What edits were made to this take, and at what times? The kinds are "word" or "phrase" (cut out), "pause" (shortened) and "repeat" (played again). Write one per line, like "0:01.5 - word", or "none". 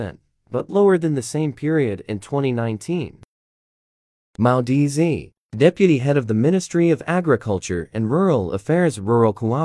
none